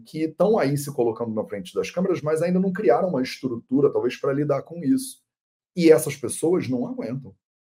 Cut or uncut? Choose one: uncut